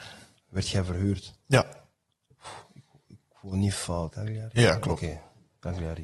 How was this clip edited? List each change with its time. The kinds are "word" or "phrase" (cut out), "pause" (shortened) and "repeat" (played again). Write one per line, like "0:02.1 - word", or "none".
0:04.1 - word